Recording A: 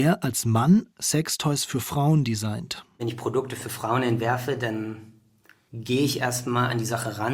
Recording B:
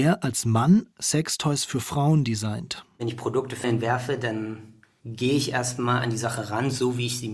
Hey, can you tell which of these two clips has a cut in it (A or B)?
B